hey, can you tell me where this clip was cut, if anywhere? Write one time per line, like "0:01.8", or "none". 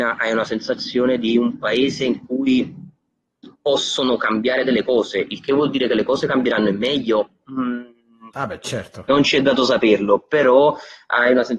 0:03.6

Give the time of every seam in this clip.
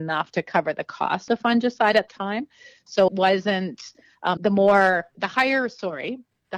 0:01.3
0:02.1
0:03.1
0:04.4
0:05.1

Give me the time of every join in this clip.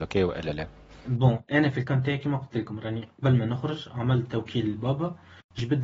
none

